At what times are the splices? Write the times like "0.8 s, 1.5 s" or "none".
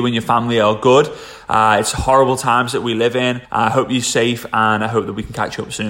3.4 s